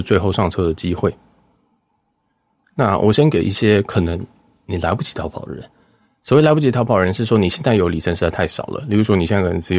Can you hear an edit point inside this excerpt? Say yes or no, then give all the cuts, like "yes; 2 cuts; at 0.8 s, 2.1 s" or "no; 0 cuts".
no; 0 cuts